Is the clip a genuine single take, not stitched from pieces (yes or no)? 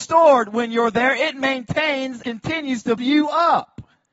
no